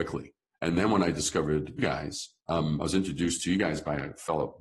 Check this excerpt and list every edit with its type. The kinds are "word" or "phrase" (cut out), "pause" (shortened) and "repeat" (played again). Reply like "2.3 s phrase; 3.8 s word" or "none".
1.8 s word; 2.4 s pause